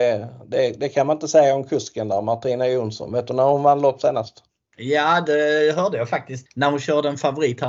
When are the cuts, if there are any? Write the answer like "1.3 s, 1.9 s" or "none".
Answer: 6.5 s